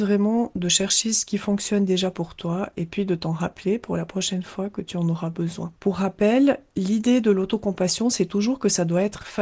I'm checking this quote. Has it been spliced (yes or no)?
yes